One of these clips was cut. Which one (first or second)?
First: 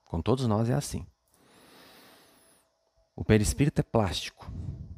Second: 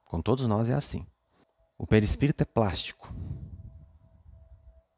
second